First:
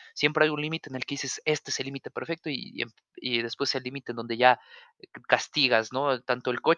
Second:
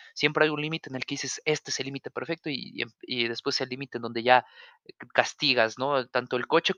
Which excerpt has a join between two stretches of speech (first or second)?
second